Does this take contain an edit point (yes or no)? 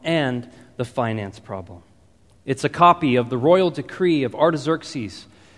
no